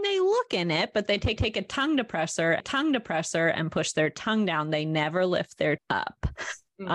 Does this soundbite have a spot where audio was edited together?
yes; 3 cuts; at 1.4 s, 2.6 s, 5.8 s

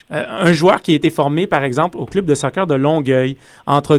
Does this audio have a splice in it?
no; 0 cuts

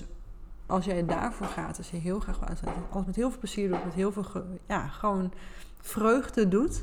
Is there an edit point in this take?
no; 0 cuts

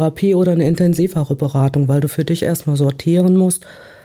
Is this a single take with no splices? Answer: yes; 0 cuts

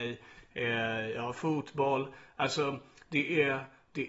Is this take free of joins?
yes; 0 cuts

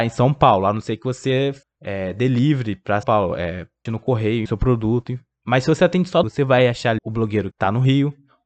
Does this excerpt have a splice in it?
yes; 7 cuts; at 1.6 s, 3.0 s, 3.9 s, 4.5 s, 6.2 s, 7.0 s, 7.5 s

